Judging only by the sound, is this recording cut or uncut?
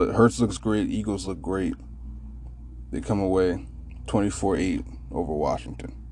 uncut